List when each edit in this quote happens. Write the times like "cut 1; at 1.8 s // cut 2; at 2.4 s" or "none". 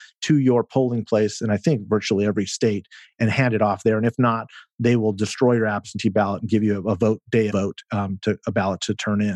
cut 1; at 7.5 s